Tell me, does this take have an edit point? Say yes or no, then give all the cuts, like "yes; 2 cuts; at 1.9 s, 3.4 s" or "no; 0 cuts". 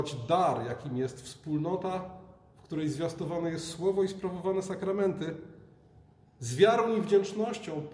no; 0 cuts